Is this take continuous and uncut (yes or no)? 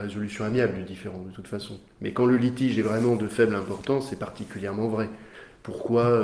yes